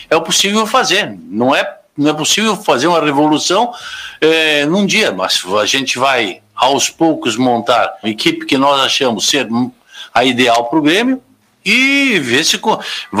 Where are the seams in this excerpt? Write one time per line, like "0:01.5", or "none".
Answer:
0:08.0